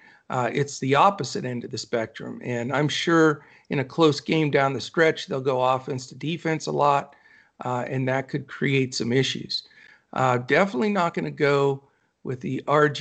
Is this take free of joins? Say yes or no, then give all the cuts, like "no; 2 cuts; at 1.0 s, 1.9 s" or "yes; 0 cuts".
yes; 0 cuts